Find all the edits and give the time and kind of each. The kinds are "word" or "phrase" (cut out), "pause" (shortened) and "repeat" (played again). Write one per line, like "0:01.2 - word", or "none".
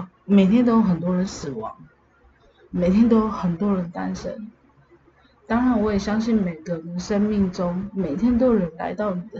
none